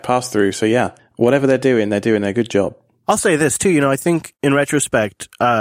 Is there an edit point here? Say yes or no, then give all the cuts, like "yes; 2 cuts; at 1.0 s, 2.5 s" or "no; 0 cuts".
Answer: yes; 1 cut; at 1.0 s